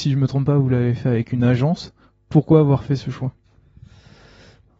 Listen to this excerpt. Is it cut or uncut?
uncut